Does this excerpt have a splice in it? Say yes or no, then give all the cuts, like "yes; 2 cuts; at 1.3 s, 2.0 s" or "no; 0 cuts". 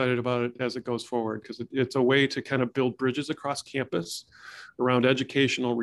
no; 0 cuts